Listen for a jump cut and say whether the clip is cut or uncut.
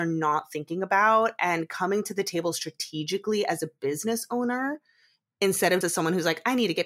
cut